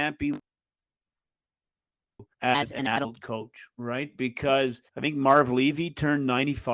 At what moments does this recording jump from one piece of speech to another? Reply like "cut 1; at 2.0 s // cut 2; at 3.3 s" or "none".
cut 1; at 2.3 s // cut 2; at 3.7 s // cut 3; at 4.9 s